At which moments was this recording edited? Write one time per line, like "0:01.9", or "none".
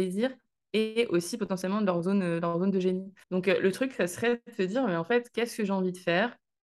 0:03.2